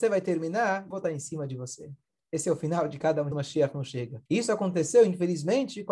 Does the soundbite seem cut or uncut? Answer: cut